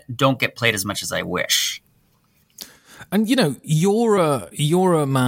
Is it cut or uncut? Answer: uncut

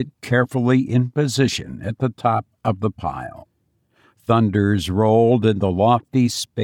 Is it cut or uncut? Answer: uncut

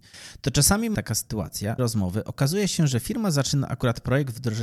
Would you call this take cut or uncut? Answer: cut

